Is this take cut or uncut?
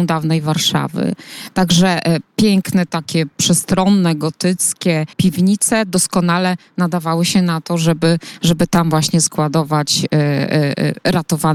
cut